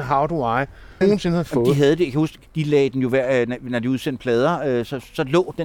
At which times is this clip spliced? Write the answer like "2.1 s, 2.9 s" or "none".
1.0 s, 2.5 s